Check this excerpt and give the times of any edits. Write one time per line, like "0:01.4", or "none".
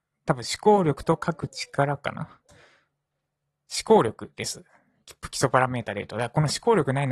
none

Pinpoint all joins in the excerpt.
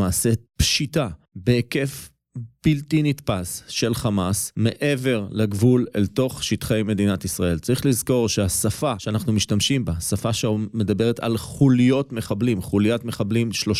none

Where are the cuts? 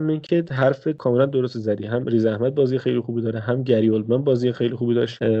none

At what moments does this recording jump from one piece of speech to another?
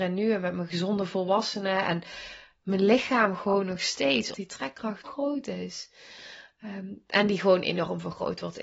0:04.3
0:05.0

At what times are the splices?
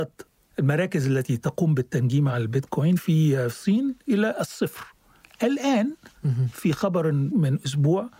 none

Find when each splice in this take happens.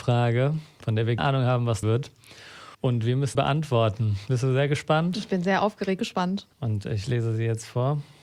0:01.2
0:01.8
0:02.7
0:03.3
0:06.0
0:06.5

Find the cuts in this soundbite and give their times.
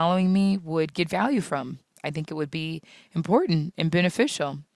none

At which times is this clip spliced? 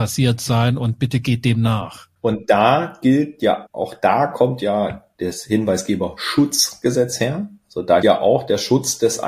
0:03.7
0:08.0

